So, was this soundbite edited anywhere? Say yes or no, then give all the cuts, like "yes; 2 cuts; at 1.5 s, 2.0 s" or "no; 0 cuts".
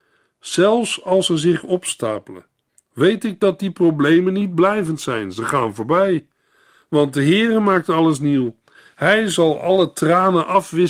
no; 0 cuts